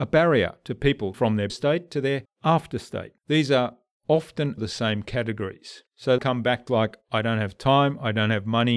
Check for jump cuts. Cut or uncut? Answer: cut